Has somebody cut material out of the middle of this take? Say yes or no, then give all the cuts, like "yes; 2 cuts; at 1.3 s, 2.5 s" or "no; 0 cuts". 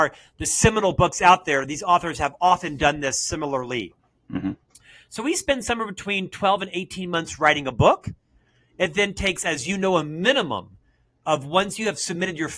no; 0 cuts